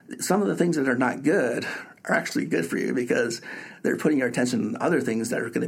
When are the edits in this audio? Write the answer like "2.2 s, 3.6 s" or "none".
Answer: none